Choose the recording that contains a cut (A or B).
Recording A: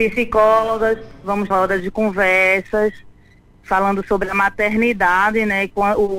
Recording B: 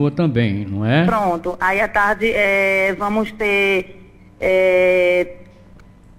A